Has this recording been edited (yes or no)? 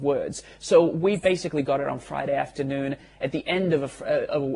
no